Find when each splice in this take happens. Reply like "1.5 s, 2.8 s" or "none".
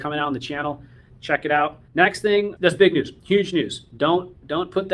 1.9 s, 2.6 s